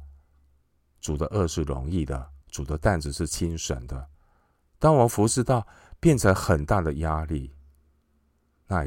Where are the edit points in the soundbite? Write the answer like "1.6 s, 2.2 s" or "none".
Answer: 2.4 s, 4.1 s

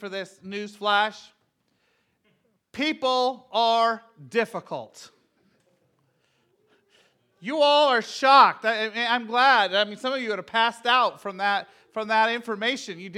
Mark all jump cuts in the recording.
none

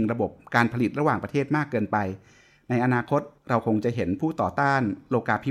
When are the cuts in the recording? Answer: 3.4 s

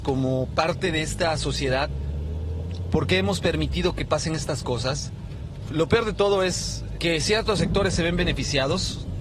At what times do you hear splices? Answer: 7.0 s

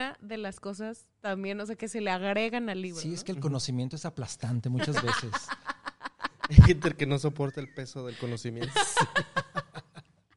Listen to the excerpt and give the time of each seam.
1.1 s

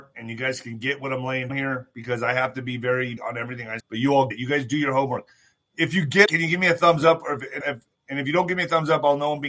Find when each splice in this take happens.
1.5 s, 3.2 s, 3.8 s, 4.3 s, 6.3 s, 7.6 s

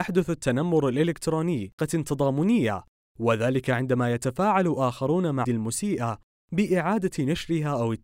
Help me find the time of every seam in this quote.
1.8 s, 5.4 s

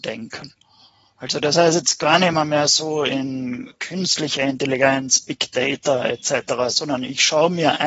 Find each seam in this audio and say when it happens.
none

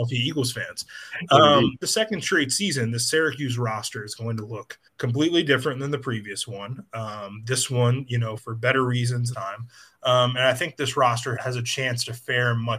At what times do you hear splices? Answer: 1.8 s, 4.9 s, 8.4 s, 9.3 s, 11.4 s

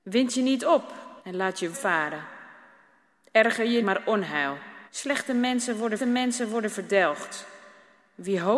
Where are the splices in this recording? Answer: 1.2 s, 1.7 s, 3.8 s, 4.9 s, 6.0 s

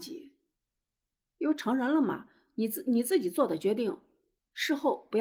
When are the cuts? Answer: none

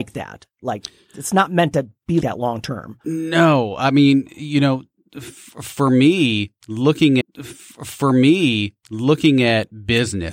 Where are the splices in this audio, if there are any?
2.2 s, 3.0 s, 7.2 s

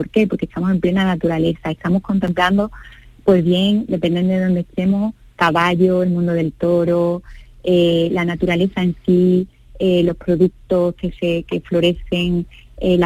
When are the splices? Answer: none

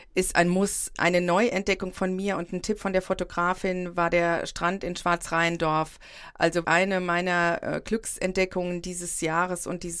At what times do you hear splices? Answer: 6.6 s

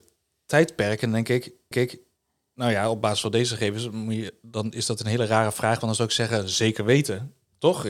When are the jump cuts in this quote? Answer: 1.7 s

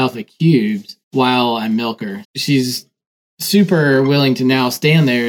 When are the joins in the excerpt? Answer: 1.0 s, 2.2 s

